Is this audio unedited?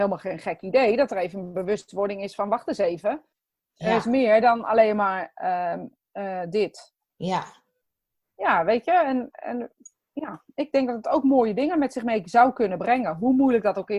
yes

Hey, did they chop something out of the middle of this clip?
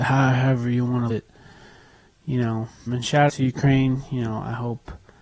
yes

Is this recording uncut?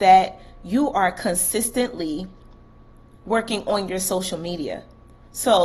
yes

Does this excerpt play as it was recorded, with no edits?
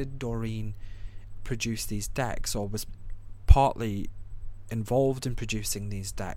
yes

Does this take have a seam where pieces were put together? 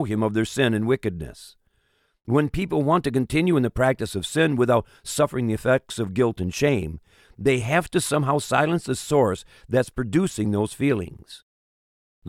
no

